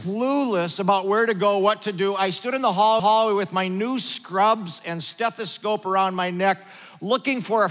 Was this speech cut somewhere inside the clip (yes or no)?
yes